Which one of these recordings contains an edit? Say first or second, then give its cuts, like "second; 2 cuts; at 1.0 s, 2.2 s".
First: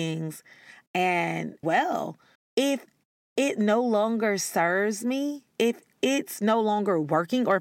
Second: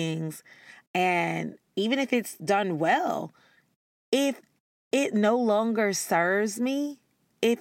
first; 3 cuts; at 1.6 s, 2.4 s, 5.5 s